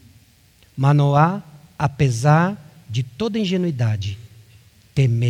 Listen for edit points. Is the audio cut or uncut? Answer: uncut